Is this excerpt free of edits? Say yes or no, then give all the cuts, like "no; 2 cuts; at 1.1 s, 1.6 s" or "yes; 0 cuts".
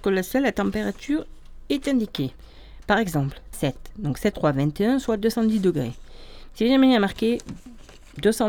no; 2 cuts; at 3.5 s, 4.3 s